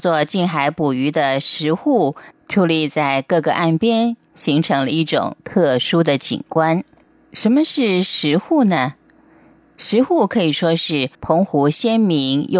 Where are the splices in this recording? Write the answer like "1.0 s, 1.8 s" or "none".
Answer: 11.1 s